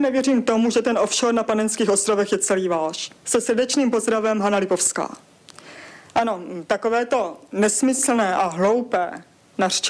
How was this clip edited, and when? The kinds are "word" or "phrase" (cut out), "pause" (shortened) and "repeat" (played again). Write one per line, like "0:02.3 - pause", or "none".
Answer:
0:03.2 - pause

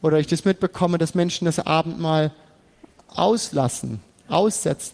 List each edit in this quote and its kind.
none

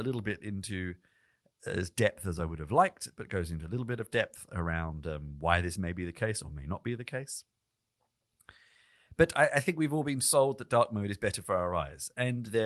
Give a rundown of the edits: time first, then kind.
none

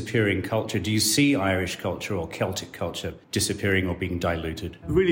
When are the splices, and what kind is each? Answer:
0:03.2 - pause

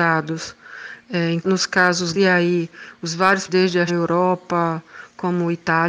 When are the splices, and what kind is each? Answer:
0:01.4 - word
0:02.1 - word
0:03.5 - word
0:03.9 - word

